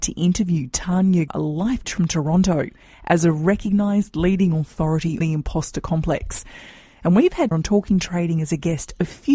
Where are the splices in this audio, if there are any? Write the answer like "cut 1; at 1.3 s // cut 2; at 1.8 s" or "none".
cut 1; at 1.3 s // cut 2; at 1.8 s // cut 3; at 5.2 s // cut 4; at 7.5 s